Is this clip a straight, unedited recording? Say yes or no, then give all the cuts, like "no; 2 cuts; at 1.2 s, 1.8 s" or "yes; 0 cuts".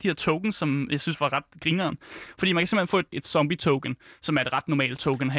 no; 1 cut; at 3.1 s